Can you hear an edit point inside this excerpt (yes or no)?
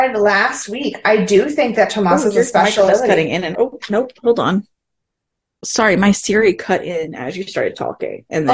yes